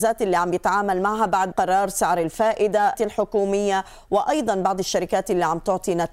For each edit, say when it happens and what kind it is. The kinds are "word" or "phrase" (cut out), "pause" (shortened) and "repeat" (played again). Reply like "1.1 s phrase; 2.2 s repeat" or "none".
1.5 s phrase; 2.9 s word

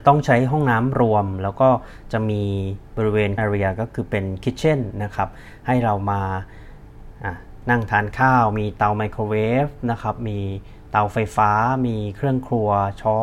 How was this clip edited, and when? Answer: 3.4 s word

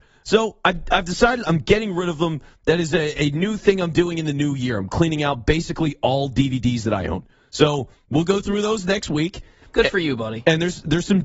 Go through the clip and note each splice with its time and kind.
none

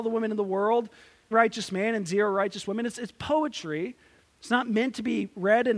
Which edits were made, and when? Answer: 1.3 s phrase

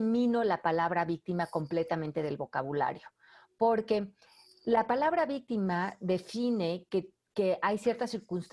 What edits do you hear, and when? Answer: none

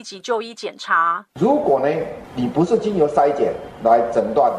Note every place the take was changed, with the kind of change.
1.3 s pause

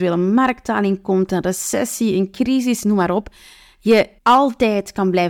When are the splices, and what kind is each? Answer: 4.2 s pause

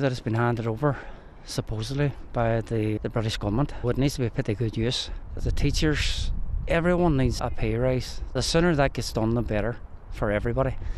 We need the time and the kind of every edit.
3.0 s word; 3.8 s word; 5.4 s word; 7.4 s word

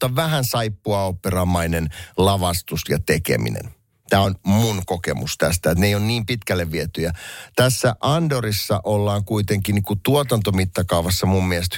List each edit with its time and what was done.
none

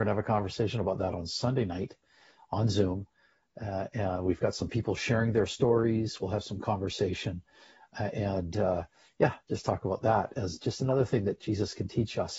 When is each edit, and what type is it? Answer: none

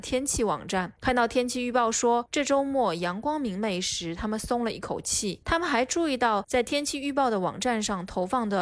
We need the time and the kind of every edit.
6.4 s word

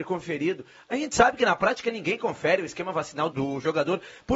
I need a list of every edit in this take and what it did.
3.3 s word

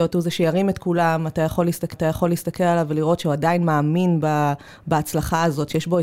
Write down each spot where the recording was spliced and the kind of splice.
1.9 s repeat

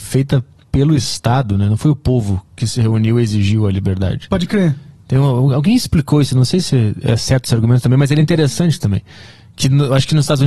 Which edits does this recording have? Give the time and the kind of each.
none

